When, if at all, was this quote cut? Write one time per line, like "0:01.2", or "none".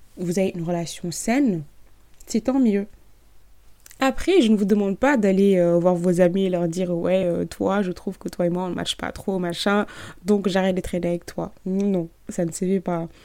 none